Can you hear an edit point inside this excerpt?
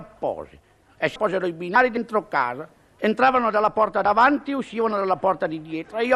yes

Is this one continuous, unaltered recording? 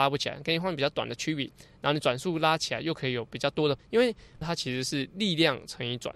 no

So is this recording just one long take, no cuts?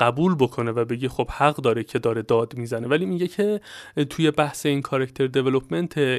yes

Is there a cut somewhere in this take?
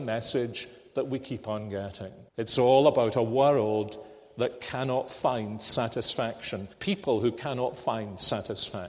yes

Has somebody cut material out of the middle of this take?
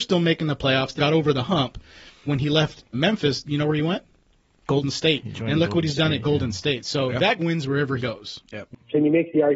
yes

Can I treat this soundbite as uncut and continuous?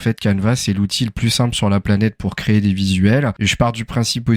yes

